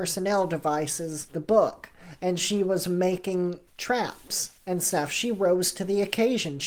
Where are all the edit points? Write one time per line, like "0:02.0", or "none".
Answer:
0:03.7